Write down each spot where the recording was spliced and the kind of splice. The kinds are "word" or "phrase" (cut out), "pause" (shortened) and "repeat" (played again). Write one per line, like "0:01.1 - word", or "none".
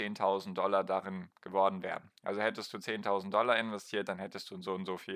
none